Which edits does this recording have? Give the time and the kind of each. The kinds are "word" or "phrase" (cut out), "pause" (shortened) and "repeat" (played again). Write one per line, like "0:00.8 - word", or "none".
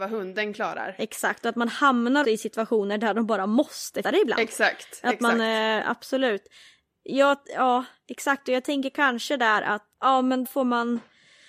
0:02.2 - word
0:04.0 - word
0:09.9 - pause
0:10.4 - word